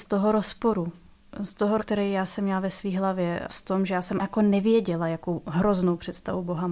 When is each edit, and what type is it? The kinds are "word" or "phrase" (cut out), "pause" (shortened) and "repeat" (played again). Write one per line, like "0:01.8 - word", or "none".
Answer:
0:01.8 - word
0:03.5 - word
0:04.2 - word